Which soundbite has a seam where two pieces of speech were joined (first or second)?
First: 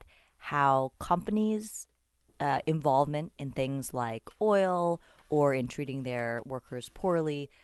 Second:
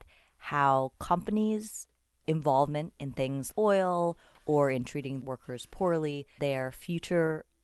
second